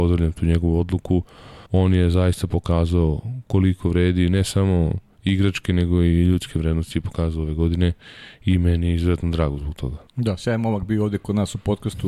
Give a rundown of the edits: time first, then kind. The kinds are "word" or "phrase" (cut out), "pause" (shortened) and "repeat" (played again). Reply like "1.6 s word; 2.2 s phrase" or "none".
1.7 s pause; 10.1 s pause